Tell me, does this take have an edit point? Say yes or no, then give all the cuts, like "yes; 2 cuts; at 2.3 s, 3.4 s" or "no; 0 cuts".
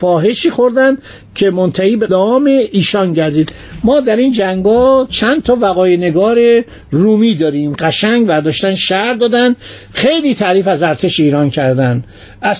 yes; 2 cuts; at 2.1 s, 7.7 s